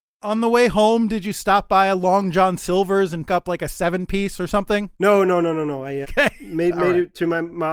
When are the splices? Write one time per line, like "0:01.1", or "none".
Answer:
0:03.3
0:04.9
0:06.0